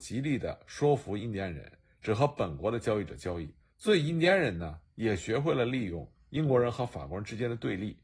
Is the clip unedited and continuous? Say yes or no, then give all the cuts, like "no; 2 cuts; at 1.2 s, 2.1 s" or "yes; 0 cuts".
no; 1 cut; at 3.6 s